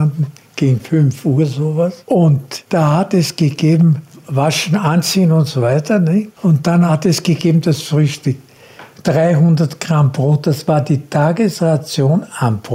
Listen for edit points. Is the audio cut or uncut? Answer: uncut